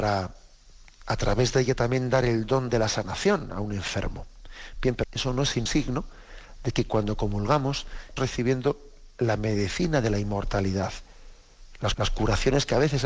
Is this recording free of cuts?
no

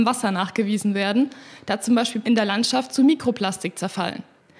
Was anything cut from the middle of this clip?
yes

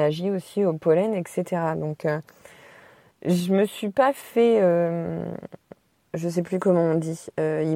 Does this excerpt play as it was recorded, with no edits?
yes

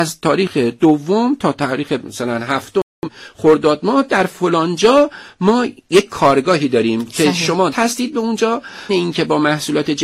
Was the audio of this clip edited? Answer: yes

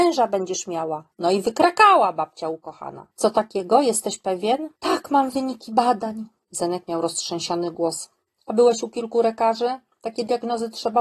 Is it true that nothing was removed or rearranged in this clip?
no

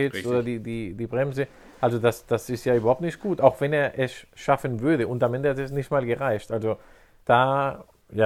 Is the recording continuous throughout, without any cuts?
yes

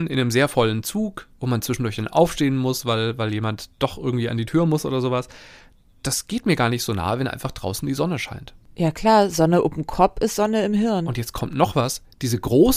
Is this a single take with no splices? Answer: yes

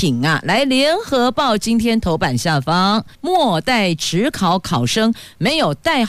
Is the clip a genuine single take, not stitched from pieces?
no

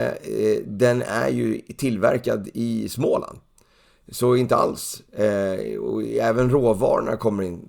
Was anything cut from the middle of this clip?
no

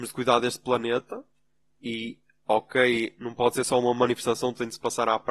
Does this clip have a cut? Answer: no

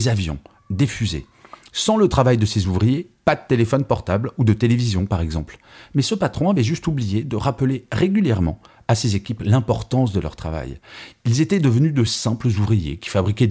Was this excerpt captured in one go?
yes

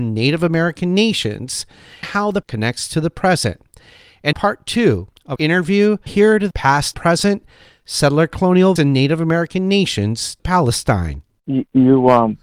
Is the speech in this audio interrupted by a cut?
yes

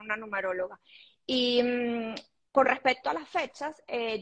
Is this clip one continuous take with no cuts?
yes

